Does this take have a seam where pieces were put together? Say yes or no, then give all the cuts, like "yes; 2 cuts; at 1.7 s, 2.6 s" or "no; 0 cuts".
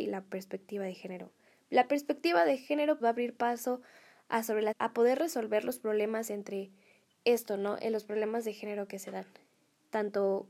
yes; 3 cuts; at 3.0 s, 4.7 s, 7.0 s